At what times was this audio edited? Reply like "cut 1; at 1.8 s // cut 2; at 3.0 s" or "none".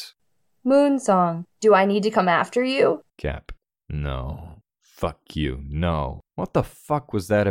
cut 1; at 1.5 s // cut 2; at 3.1 s // cut 3; at 4.7 s // cut 4; at 6.3 s